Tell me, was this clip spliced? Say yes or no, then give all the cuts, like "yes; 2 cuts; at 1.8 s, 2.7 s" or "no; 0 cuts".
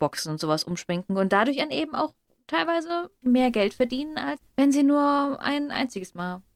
yes; 2 cuts; at 3.2 s, 4.4 s